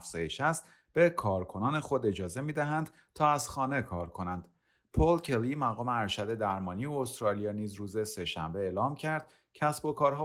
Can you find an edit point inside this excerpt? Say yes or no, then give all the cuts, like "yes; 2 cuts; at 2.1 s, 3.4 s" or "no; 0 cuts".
no; 0 cuts